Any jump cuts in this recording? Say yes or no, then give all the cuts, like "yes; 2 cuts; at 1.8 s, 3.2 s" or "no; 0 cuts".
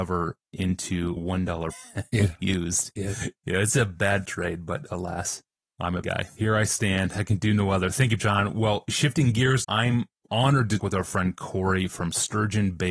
yes; 7 cuts; at 1.2 s, 1.7 s, 4.3 s, 6.0 s, 8.2 s, 9.6 s, 10.8 s